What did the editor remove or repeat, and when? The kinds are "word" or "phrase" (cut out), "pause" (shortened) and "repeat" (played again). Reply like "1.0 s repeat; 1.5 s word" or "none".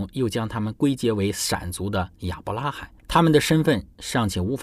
3.0 s pause